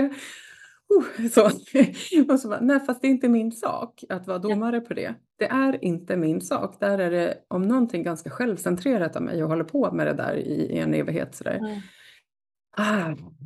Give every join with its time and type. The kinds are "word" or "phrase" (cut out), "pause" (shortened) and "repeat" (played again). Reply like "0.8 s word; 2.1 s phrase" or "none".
none